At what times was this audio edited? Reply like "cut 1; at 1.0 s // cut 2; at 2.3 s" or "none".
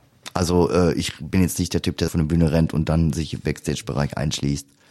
cut 1; at 2.1 s